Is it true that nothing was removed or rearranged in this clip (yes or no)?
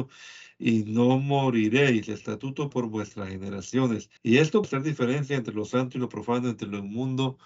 no